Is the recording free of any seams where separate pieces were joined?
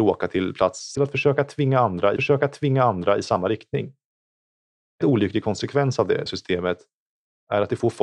no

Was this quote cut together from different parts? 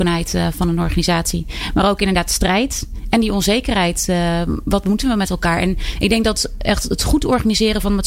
no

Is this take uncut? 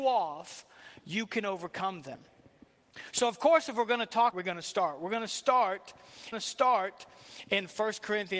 no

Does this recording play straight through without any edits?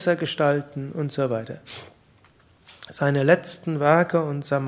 yes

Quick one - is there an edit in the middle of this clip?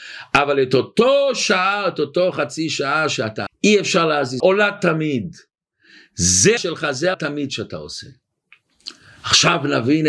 yes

